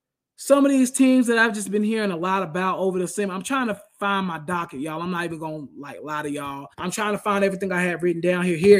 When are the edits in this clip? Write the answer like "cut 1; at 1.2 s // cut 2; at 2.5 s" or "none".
cut 1; at 6.7 s